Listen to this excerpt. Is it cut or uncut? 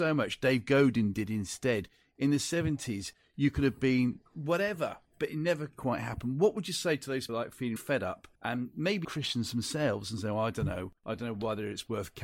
cut